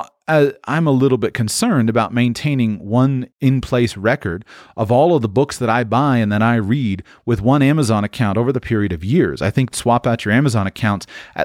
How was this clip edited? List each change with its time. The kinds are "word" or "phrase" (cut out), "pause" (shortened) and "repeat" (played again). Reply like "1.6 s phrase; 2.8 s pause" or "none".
3.3 s pause; 9.7 s phrase